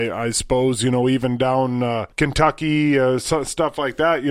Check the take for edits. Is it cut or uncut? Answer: cut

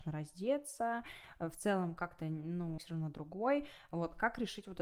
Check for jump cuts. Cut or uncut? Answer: cut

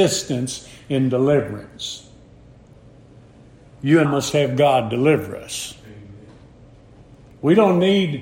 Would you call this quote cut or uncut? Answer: cut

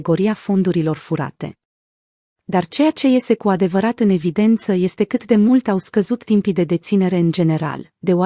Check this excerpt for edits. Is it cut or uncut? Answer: uncut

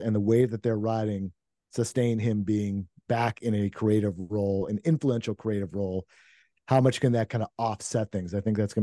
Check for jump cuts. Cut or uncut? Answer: uncut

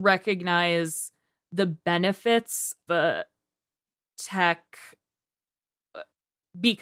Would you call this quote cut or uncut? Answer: cut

